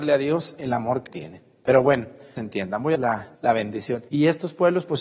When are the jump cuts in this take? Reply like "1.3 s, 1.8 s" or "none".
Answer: 1.1 s, 2.4 s, 2.9 s, 3.4 s, 4.1 s